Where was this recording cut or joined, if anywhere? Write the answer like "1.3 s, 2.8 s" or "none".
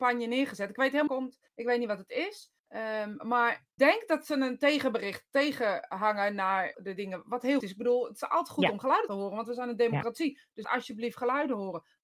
1.1 s, 1.5 s, 2.6 s, 3.8 s, 6.7 s, 7.6 s, 9.1 s, 10.6 s

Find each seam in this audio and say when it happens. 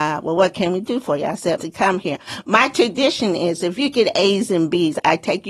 1.6 s

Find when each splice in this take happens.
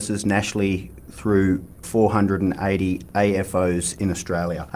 1.8 s

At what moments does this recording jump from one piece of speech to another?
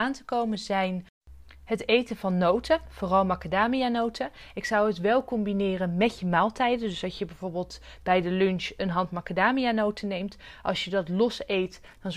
none

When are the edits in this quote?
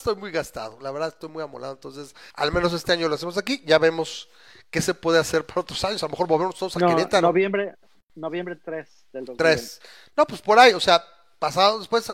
2.3 s

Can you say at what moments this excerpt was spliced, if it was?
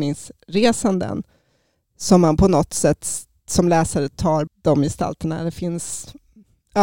4.5 s

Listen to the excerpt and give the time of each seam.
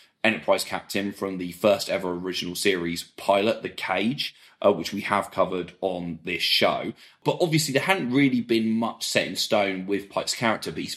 none

